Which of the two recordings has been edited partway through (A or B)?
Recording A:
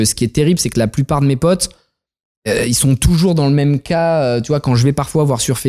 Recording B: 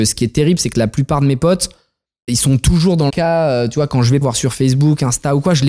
B